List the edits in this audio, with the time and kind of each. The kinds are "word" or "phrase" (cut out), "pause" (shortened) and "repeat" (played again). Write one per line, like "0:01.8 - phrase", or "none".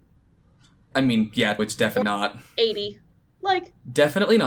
0:01.6 - word
0:02.0 - word